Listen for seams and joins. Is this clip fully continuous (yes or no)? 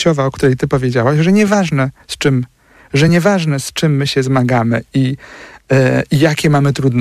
yes